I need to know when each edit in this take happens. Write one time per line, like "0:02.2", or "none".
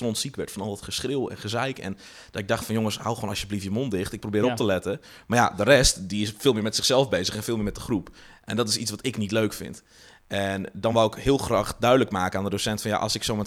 none